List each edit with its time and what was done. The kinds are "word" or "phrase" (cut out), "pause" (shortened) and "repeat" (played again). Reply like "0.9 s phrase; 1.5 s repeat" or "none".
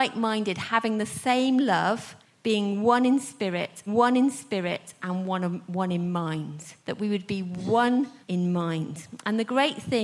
2.2 s pause; 3.9 s repeat; 6.8 s pause; 8.2 s phrase